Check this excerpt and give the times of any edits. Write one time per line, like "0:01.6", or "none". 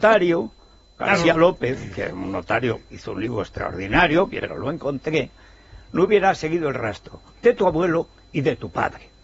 0:04.4